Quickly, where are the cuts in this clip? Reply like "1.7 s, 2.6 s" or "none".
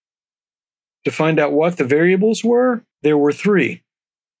2.9 s